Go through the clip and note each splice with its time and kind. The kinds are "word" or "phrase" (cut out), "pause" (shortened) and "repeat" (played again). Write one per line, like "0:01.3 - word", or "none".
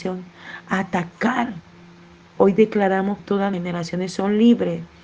0:02.4 - word
0:03.2 - word
0:03.5 - word